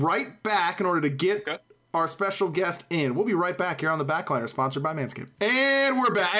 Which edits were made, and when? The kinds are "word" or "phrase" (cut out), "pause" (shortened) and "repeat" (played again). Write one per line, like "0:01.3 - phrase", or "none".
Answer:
none